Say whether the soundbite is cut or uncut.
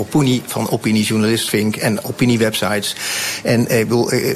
cut